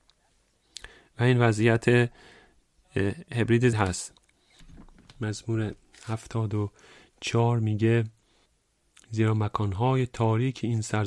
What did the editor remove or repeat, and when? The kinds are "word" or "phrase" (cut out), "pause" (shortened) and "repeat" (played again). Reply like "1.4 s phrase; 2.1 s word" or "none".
3.7 s word